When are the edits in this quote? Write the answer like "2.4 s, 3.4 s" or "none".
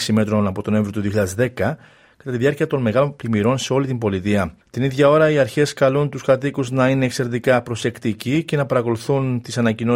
4.6 s